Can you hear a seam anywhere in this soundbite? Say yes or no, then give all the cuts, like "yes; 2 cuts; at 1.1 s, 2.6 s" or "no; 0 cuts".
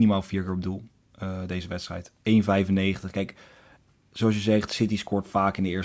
no; 0 cuts